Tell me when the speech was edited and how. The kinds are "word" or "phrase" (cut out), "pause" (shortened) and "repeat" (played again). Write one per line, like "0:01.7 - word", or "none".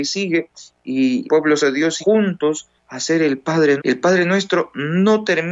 0:01.2 - word
0:01.6 - word
0:02.0 - word
0:02.8 - pause
0:03.8 - word